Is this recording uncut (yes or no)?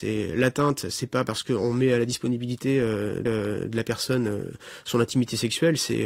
no